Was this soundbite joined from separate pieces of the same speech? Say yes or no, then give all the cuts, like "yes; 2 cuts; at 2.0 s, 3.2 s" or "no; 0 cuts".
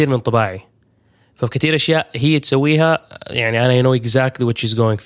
yes; 1 cut; at 2.4 s